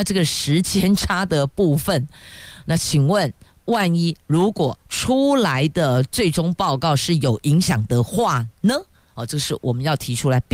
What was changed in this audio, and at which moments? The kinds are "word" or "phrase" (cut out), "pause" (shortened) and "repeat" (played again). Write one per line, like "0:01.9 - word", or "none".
none